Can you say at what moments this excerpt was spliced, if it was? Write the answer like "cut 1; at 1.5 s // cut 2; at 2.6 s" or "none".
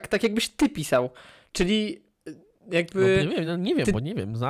none